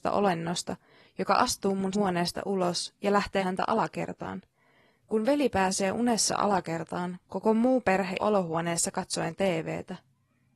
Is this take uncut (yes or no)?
no